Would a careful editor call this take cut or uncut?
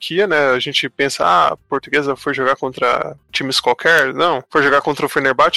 cut